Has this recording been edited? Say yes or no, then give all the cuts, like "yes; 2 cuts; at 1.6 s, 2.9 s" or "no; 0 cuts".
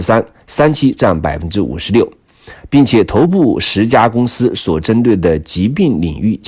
no; 0 cuts